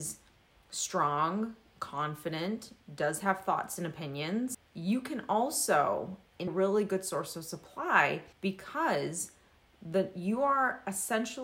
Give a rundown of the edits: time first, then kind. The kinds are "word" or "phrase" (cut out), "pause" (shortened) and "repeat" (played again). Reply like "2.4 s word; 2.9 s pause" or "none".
6.5 s phrase; 8.3 s pause

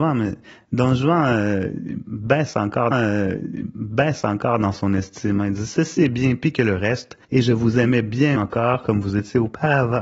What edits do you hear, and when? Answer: 2.9 s repeat; 7.2 s pause; 8.4 s word

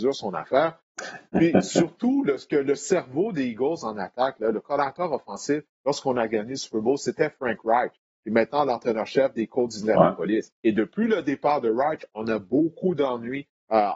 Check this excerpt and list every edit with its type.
10.6 s pause

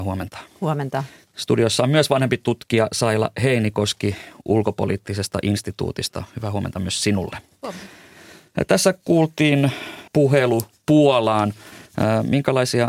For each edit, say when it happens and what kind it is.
1.2 s pause; 10.1 s pause

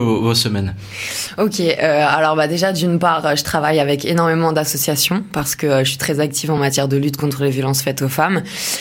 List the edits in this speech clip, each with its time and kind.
none

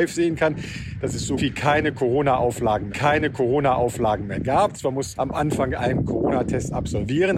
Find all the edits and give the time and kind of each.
1.4 s word; 2.9 s repeat; 5.2 s phrase; 5.8 s word

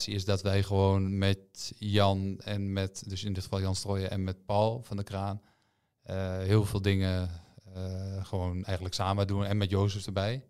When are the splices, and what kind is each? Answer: none

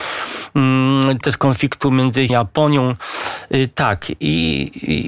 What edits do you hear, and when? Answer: 1.2 s word; 2.3 s word

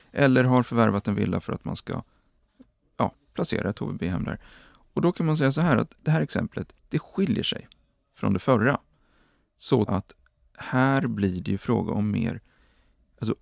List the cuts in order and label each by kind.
5.9 s word; 6.8 s pause; 9.9 s word

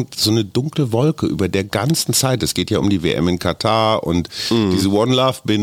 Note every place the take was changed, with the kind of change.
none

